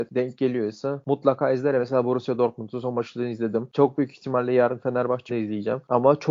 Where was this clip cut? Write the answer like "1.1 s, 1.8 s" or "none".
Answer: 5.3 s